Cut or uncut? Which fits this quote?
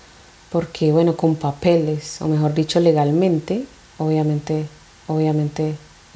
cut